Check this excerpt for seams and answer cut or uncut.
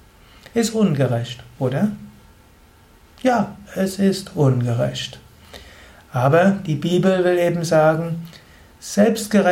uncut